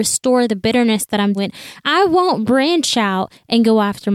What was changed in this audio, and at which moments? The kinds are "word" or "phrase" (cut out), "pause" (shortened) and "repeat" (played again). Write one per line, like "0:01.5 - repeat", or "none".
0:01.4 - word

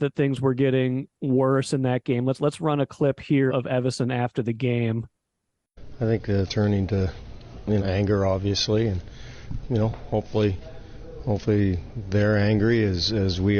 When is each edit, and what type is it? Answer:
0:03.5 - word
0:06.5 - word
0:07.8 - word
0:09.6 - word

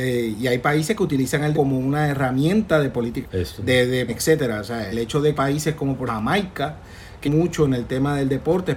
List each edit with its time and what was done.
0:01.5 - word
0:03.2 - word
0:03.6 - word
0:04.1 - word
0:04.9 - word
0:05.3 - word
0:06.1 - word
0:07.2 - word

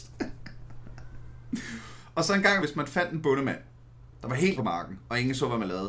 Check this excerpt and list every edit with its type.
0:02.6 - word
0:04.6 - word

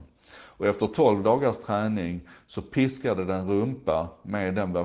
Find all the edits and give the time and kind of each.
none

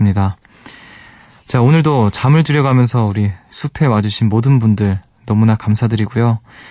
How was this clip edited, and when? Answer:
none

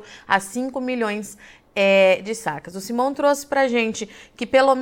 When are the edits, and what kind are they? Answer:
none

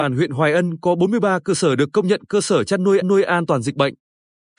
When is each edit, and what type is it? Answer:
0:03.0 - repeat

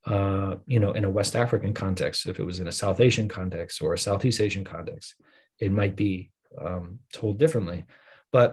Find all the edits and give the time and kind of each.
none

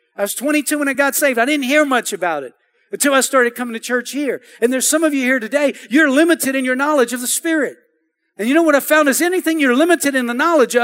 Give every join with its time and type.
none

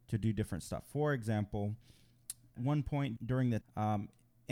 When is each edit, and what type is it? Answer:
0:02.6 - word
0:03.2 - word
0:03.6 - word

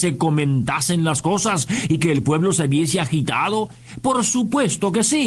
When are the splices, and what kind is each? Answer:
none

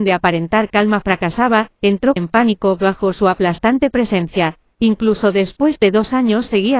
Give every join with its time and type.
0:02.2 - word

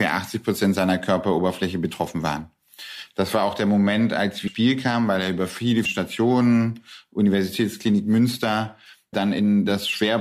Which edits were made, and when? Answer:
0:04.5 - word
0:05.9 - word
0:09.1 - word

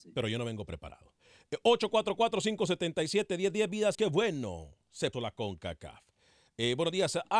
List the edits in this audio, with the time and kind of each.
0:03.9 - word
0:05.1 - word

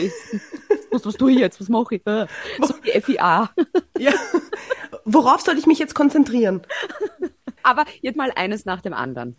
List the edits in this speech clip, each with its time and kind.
0:08.1 - word

